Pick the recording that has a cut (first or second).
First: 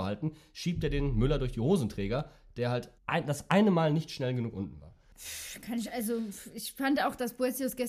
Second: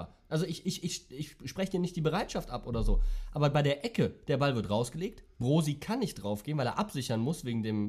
first